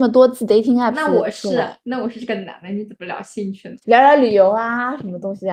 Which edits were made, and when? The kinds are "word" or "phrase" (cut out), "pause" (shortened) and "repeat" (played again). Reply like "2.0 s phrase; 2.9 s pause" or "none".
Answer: 3.8 s pause